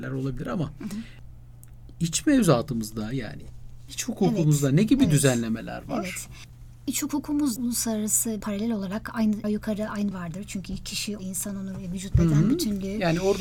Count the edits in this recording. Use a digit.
6